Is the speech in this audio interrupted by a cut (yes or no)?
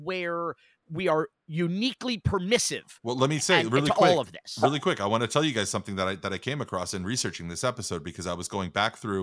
no